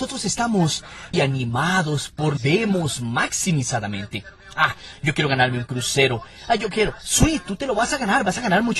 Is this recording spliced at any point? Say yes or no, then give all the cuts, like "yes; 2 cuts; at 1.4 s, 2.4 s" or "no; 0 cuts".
yes; 2 cuts; at 1.1 s, 2.4 s